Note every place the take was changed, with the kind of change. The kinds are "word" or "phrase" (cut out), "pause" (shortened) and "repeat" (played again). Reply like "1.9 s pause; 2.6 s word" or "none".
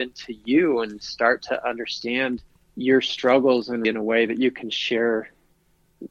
2.5 s pause; 3.8 s word